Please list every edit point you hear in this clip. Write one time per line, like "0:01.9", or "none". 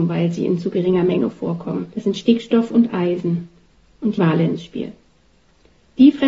0:01.9
0:04.2

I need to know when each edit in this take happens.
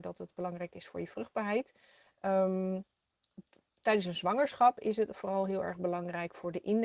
none

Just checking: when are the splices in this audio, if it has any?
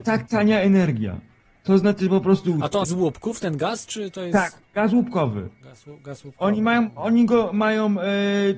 0:02.8

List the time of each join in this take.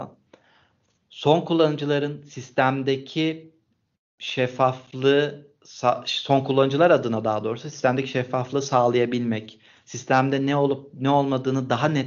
none

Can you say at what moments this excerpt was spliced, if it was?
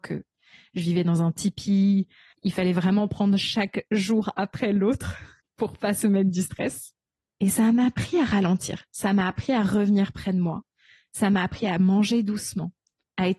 none

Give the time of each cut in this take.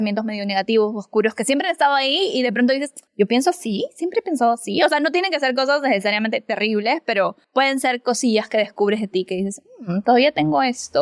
0:03.1
0:07.4

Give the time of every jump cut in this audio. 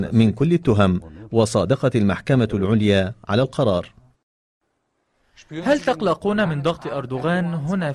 none

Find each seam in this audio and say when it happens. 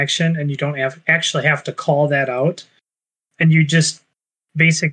none

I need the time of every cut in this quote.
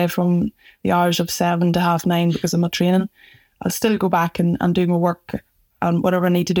none

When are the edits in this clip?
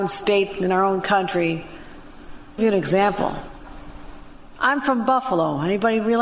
0:02.6

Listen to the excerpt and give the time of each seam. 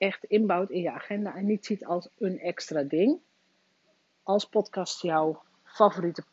none

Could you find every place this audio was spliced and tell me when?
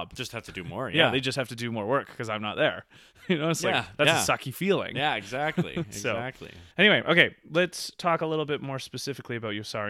0:06.7

